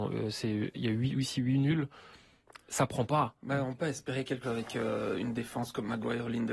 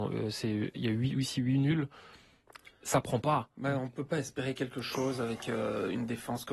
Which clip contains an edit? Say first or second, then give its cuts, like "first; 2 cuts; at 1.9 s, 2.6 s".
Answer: first; 3 cuts; at 2.6 s, 3.8 s, 4.4 s